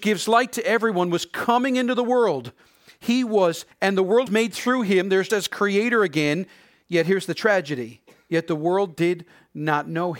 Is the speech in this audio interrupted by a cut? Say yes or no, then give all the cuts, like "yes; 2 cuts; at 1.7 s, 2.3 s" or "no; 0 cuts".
yes; 3 cuts; at 3.7 s, 4.3 s, 5.3 s